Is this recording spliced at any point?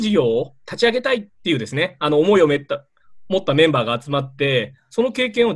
yes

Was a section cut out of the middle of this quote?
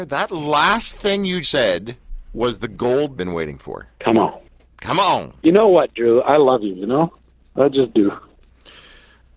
yes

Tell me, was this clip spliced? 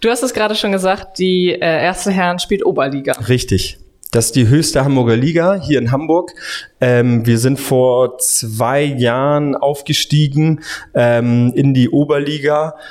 no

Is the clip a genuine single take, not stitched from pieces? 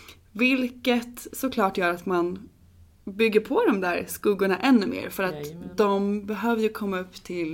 yes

